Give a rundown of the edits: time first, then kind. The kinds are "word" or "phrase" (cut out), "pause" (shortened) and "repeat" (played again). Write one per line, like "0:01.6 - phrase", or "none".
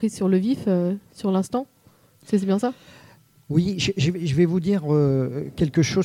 none